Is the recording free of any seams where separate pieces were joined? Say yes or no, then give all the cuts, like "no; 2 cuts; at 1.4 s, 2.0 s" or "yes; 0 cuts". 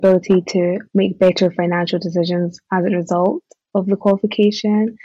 yes; 0 cuts